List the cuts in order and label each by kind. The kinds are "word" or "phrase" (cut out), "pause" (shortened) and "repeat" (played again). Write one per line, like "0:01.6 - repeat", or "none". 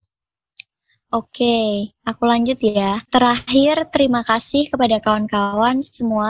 0:03.1 - pause